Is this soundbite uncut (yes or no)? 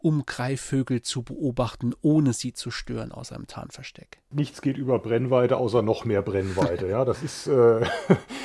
no